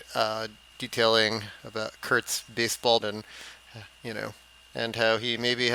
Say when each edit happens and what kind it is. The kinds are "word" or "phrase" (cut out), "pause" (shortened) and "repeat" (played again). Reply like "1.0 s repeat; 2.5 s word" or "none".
3.0 s word